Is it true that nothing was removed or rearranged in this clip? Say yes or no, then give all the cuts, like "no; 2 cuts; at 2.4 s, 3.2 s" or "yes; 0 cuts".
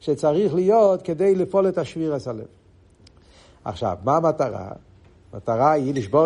yes; 0 cuts